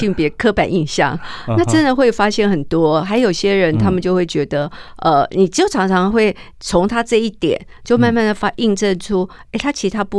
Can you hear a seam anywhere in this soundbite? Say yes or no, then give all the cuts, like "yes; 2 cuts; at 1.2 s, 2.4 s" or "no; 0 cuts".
no; 0 cuts